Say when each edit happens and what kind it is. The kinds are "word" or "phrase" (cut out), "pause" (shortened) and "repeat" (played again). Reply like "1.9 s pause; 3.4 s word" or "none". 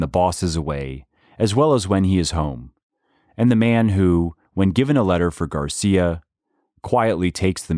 none